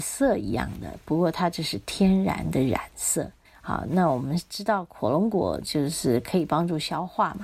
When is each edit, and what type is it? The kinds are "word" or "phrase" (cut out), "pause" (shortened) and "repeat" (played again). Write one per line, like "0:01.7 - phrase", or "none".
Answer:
0:03.4 - pause